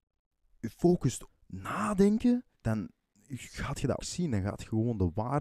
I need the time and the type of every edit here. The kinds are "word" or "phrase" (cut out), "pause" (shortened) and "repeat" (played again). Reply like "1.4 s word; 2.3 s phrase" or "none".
1.3 s word; 2.5 s pause; 4.0 s word